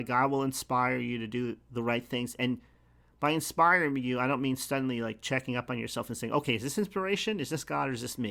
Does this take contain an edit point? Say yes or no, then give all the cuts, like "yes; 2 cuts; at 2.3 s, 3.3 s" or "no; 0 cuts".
no; 0 cuts